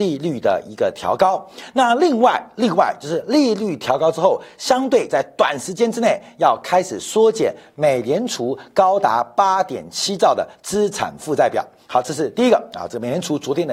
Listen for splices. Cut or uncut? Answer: uncut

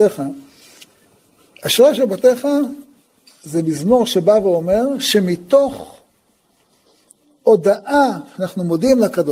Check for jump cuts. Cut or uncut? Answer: uncut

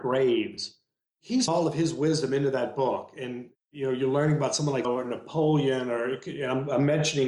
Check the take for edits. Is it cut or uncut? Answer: cut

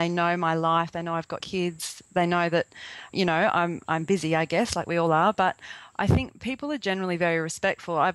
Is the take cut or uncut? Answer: cut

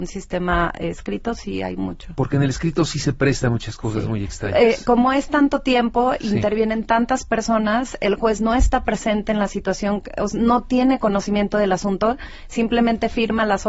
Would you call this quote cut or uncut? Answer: uncut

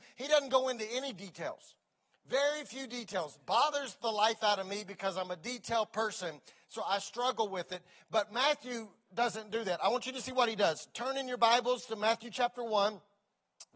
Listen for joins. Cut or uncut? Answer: uncut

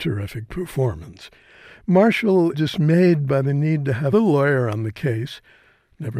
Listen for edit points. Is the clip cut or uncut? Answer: cut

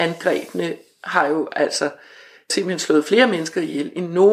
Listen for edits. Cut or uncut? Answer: uncut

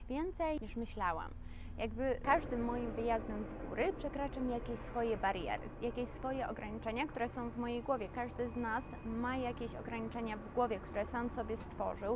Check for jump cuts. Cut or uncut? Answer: uncut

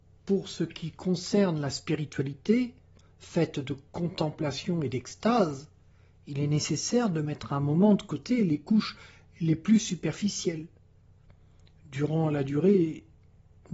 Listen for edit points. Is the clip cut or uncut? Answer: uncut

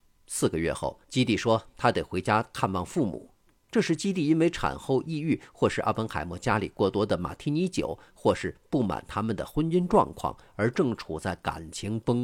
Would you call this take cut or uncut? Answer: cut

